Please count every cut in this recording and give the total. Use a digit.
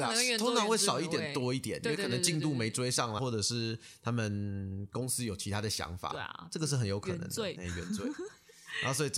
2